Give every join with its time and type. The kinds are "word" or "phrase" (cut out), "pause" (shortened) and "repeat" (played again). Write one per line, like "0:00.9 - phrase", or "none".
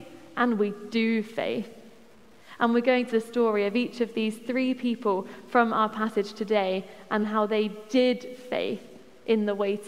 0:03.1 - phrase
0:07.2 - word